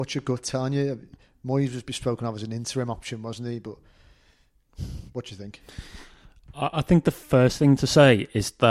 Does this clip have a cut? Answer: no; 0 cuts

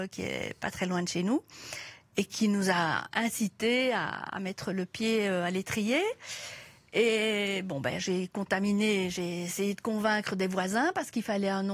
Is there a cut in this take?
no; 0 cuts

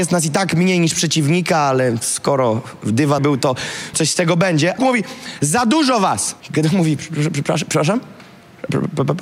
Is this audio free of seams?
no; 4 cuts; at 3.2 s, 3.9 s, 4.8 s, 6.4 s

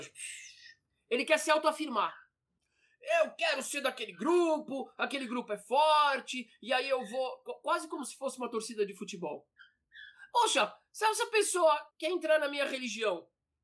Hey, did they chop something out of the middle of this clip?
yes; 1 cut; at 11.9 s

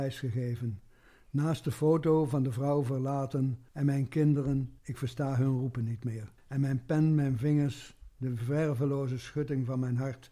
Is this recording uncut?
no; 3 cuts; at 3.7 s, 4.8 s, 6.4 s

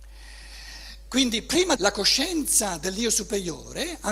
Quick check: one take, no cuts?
no; 1 cut; at 1.8 s

